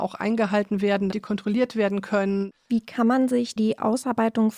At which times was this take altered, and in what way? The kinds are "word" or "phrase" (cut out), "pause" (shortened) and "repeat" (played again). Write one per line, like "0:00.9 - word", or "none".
0:01.1 - word
0:03.6 - word